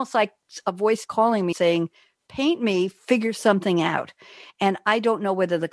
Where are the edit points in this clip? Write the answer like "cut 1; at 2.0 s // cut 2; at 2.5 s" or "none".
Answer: cut 1; at 1.0 s // cut 2; at 1.5 s